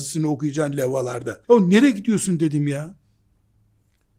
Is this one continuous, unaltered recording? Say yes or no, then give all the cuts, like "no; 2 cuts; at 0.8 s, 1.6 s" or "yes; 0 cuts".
no; 1 cut; at 1.4 s